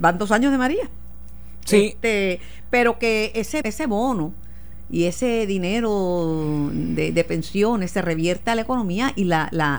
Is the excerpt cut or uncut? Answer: cut